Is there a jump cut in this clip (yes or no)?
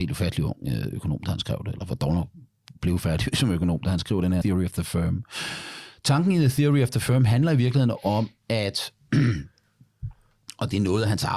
yes